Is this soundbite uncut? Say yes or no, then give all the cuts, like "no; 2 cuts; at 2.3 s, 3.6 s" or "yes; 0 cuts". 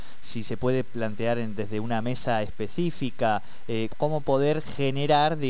no; 1 cut; at 3.9 s